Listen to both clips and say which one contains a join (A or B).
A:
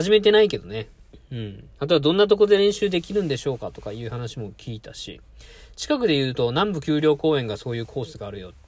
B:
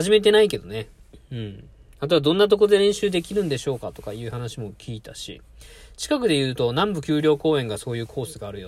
A